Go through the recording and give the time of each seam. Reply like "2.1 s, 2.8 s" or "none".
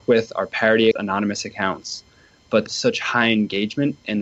0.9 s, 2.7 s